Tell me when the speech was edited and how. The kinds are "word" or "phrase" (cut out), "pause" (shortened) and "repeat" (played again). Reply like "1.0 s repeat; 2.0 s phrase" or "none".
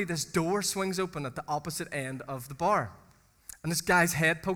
none